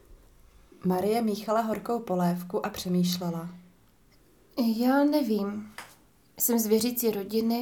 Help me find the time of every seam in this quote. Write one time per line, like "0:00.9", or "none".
none